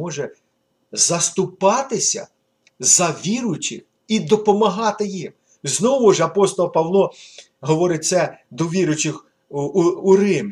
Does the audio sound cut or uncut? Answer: uncut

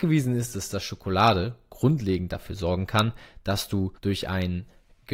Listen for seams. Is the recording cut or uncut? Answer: cut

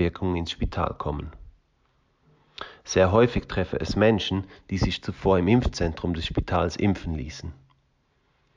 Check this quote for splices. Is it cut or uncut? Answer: uncut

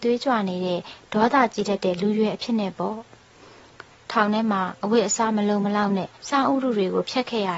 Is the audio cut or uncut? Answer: cut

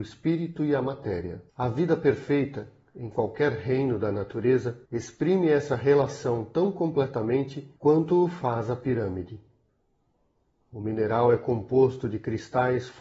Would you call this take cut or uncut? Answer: cut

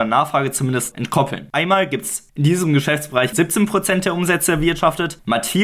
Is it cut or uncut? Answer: cut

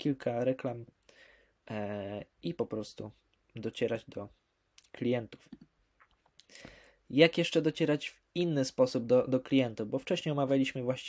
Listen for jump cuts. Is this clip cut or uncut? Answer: uncut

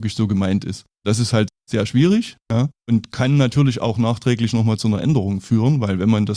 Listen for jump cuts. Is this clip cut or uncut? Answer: cut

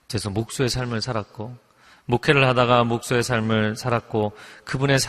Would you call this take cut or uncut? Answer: uncut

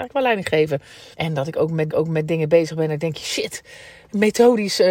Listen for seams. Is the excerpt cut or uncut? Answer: cut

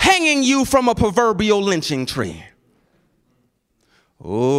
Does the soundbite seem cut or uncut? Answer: uncut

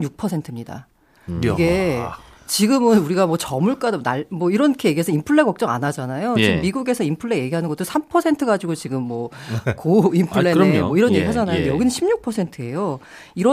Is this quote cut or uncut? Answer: uncut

